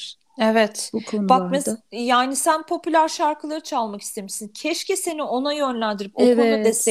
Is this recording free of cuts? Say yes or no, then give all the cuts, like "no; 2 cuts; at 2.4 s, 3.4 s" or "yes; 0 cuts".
yes; 0 cuts